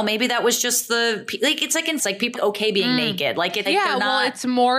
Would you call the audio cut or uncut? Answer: cut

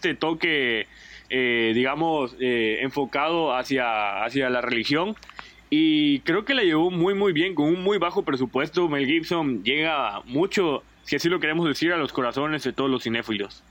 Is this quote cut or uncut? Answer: uncut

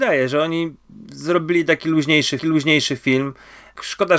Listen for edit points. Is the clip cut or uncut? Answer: cut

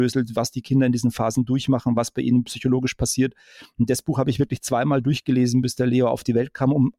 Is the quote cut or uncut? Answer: uncut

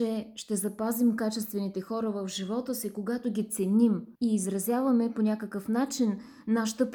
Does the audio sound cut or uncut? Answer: cut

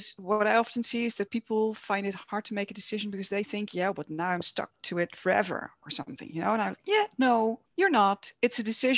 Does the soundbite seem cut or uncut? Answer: cut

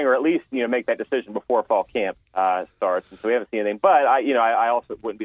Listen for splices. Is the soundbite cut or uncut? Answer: cut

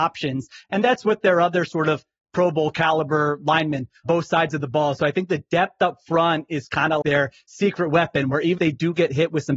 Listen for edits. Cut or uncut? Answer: cut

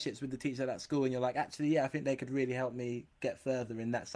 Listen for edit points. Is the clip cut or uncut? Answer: uncut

